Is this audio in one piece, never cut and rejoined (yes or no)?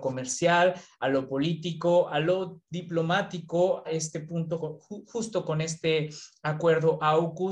no